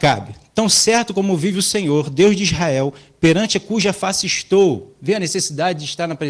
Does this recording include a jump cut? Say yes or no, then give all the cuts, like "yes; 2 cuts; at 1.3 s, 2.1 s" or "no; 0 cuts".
no; 0 cuts